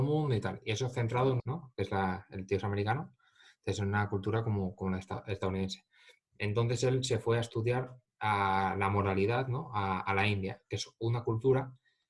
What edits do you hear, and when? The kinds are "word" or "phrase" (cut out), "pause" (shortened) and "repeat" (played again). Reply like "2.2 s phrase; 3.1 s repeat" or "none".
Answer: 1.4 s phrase